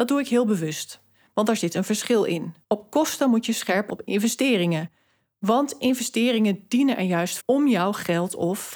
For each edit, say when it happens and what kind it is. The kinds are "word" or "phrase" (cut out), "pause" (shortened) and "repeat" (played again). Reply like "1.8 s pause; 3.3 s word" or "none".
2.6 s pause; 3.9 s phrase; 7.4 s word